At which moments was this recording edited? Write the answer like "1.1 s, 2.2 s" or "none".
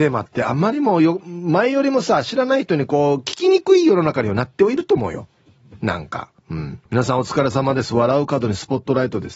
6.4 s, 6.9 s